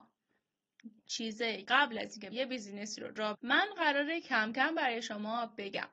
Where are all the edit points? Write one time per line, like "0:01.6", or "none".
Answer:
0:01.0
0:01.6
0:02.3
0:03.3
0:04.2